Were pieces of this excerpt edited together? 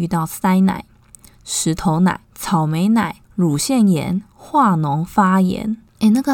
yes; 2 cuts; at 2.2 s, 3.2 s

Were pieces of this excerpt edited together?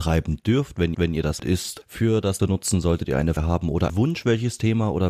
yes; 6 cuts; at 0.9 s, 1.4 s, 1.8 s, 2.4 s, 3.4 s, 3.9 s

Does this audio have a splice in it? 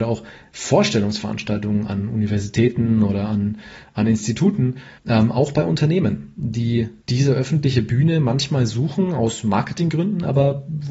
yes; 2 cuts; at 5.0 s, 7.0 s

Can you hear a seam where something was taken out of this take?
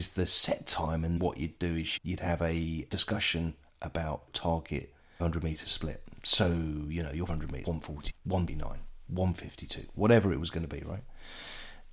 yes; 9 cuts; at 1.2 s, 2.0 s, 2.9 s, 4.3 s, 5.2 s, 7.3 s, 7.6 s, 8.1 s, 8.5 s

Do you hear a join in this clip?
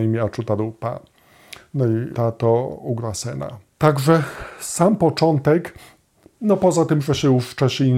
yes; 2 cuts; at 2.1 s, 3.7 s

